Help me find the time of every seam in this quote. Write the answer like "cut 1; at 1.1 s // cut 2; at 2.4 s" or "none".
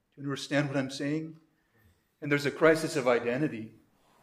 none

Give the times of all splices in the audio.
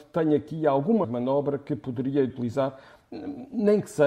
cut 1; at 1.0 s // cut 2; at 2.3 s

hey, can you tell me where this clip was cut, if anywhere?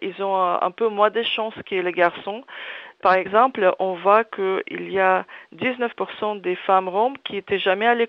none

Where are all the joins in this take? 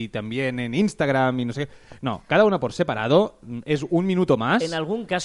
none

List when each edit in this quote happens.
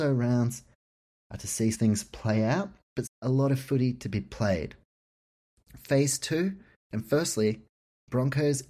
cut 1; at 1.7 s // cut 2; at 3.0 s

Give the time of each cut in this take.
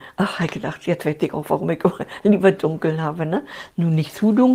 none

